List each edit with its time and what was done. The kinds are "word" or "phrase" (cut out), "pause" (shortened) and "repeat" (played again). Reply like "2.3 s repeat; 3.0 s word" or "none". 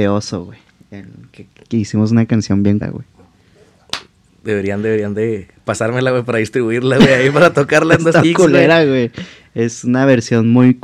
2.8 s word; 8.2 s word